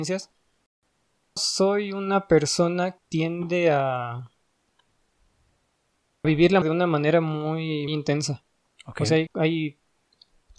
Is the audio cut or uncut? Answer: cut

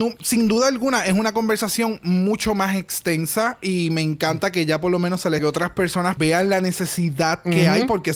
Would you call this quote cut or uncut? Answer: cut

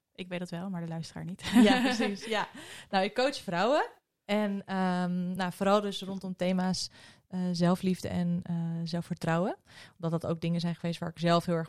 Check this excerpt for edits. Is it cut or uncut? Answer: uncut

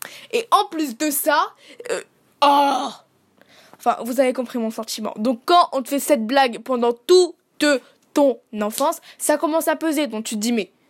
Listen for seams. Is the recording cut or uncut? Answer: uncut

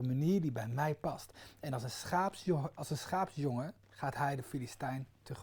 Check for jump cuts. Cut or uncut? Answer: cut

